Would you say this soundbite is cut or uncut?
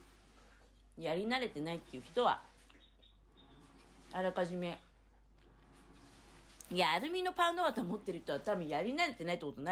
uncut